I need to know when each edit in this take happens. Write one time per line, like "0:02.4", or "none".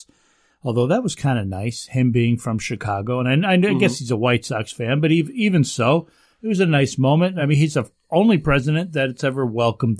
none